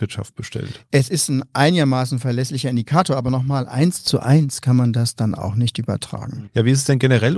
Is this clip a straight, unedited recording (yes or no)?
yes